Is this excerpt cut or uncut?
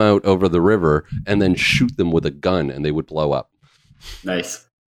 uncut